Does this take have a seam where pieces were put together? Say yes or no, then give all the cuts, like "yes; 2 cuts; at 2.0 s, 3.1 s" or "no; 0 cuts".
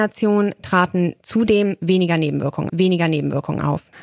yes; 1 cut; at 2.7 s